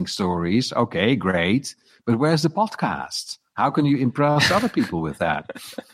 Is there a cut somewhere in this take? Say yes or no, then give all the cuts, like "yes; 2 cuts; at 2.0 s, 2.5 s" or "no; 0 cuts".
no; 0 cuts